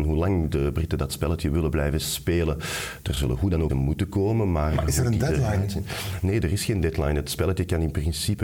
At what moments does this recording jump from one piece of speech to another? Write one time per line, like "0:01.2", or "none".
0:03.7